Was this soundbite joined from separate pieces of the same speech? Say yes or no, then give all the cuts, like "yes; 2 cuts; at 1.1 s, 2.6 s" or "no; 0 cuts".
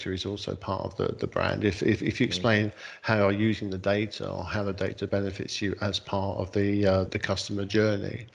yes; 1 cut; at 7.1 s